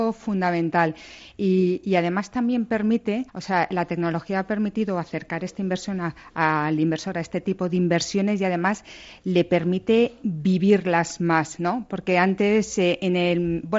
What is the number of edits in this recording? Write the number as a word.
one